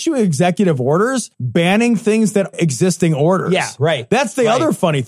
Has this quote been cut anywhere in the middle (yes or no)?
yes